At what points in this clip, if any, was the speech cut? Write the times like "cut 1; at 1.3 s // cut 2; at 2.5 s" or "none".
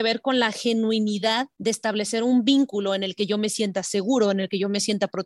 none